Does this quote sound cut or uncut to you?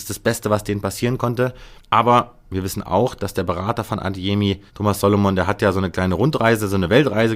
cut